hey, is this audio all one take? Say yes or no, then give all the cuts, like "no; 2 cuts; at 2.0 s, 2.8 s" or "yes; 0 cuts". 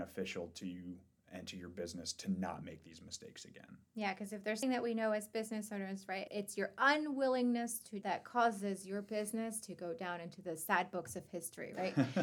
no; 3 cuts; at 4.6 s, 6.3 s, 8.0 s